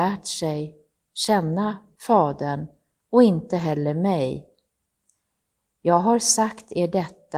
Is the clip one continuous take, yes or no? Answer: yes